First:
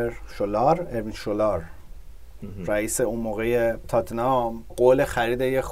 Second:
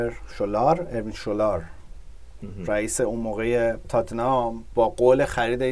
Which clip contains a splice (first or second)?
first